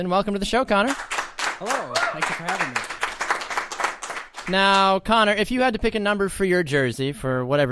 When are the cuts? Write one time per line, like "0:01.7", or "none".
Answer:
none